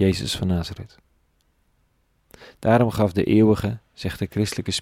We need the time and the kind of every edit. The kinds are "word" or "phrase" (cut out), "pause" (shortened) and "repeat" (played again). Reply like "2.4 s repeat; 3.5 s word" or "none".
none